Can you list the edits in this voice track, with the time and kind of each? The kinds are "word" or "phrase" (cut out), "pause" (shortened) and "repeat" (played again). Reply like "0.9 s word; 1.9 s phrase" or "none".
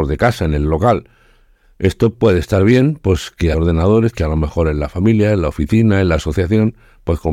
2.1 s word; 3.5 s word